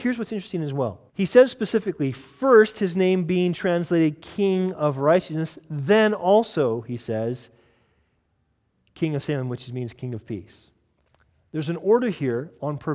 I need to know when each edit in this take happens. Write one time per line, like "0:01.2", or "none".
0:01.1